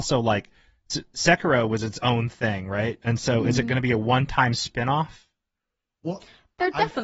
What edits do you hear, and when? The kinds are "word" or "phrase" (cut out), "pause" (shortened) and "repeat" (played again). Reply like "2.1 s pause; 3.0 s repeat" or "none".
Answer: none